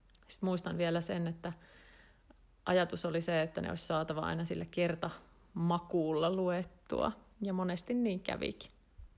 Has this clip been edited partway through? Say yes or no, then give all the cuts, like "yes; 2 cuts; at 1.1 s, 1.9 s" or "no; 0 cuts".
no; 0 cuts